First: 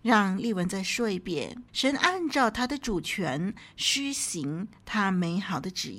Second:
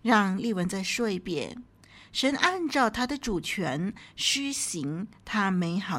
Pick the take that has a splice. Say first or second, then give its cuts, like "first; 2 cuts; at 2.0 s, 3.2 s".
first; 1 cut; at 1.7 s